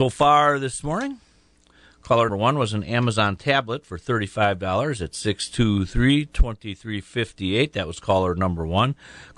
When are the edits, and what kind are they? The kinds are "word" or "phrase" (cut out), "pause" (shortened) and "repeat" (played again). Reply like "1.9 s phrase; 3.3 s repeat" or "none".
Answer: 2.3 s word

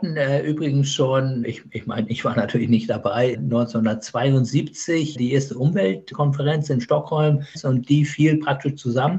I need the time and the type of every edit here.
none

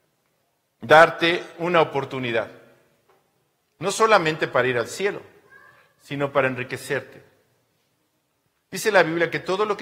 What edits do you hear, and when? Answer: none

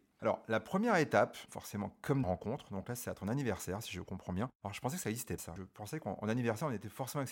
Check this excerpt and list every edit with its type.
1.5 s word; 2.2 s phrase; 5.4 s word

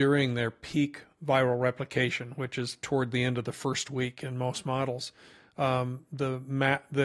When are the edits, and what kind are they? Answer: none

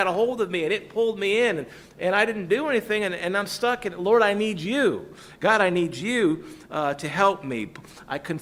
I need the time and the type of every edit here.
none

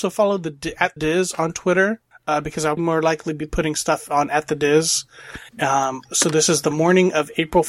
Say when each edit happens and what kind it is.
1.0 s word; 2.1 s pause; 2.8 s word; 5.5 s pause

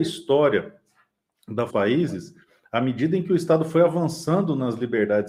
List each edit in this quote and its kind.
1.7 s phrase

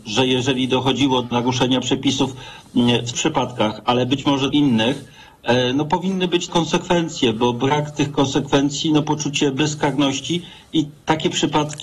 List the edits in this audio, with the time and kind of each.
1.3 s word; 3.1 s word; 4.5 s word; 6.5 s word; 9.0 s word

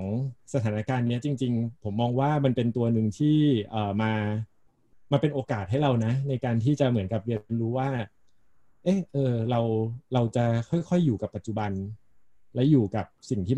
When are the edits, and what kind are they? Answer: none

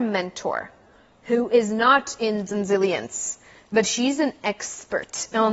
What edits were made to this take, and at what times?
2.5 s phrase

